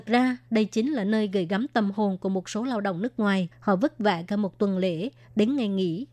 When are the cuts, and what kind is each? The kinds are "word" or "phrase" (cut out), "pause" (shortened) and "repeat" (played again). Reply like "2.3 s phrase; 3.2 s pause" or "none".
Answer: 3.5 s pause